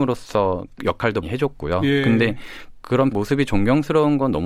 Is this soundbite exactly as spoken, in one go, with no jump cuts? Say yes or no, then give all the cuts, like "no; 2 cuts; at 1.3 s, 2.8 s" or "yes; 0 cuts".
no; 2 cuts; at 1.2 s, 3.1 s